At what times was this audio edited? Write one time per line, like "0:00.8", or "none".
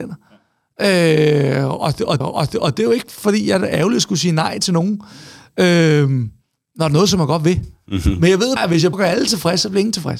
0:02.2
0:08.6
0:08.9